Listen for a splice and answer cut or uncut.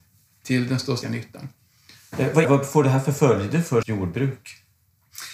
cut